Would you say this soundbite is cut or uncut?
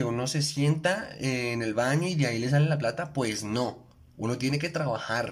uncut